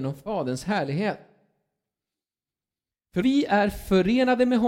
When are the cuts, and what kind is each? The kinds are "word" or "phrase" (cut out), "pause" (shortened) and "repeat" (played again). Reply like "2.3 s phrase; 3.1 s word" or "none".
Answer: 3.2 s word